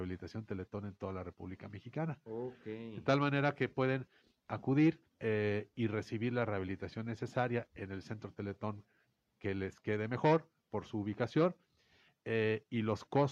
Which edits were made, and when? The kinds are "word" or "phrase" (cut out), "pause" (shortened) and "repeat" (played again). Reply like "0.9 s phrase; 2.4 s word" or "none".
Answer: 5.1 s pause